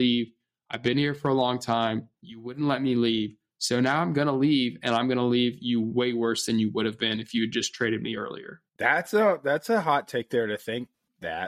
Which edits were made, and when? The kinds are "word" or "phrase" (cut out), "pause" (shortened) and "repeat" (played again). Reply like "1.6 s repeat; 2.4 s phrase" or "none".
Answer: 8.7 s pause

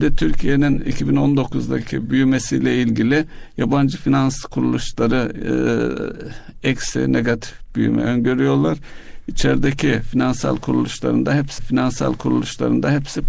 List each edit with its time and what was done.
11.6 s repeat

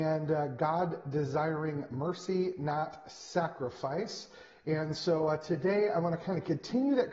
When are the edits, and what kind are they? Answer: none

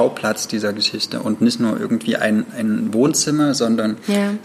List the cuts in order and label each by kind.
none

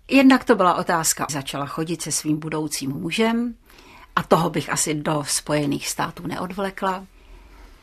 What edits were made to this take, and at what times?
1.3 s phrase

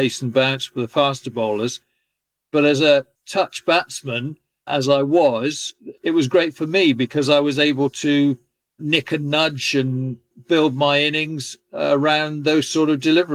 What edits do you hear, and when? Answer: none

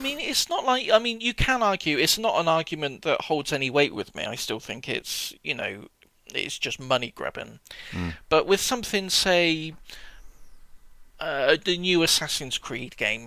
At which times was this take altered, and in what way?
11.1 s pause

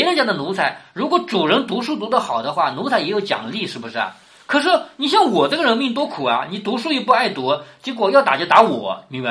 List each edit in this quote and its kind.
none

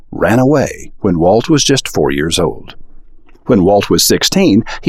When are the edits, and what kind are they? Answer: none

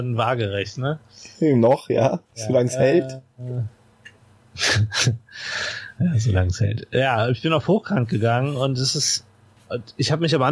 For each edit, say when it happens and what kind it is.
2.2 s pause

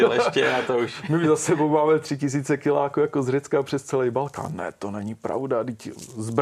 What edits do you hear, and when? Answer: none

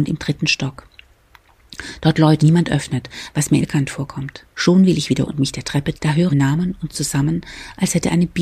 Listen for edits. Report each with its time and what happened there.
2.4 s word; 3.6 s word; 4.5 s pause; 5.3 s word; 5.9 s word; 6.3 s phrase; 6.9 s word

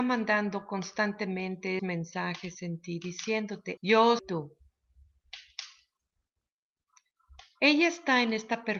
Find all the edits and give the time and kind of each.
1.8 s word; 3.8 s word; 4.2 s word

